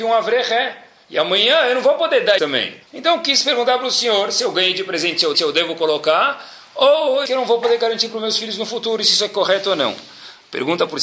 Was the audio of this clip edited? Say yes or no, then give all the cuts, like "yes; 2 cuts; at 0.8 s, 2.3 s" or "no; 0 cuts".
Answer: yes; 4 cuts; at 2.4 s, 2.8 s, 5.3 s, 7.3 s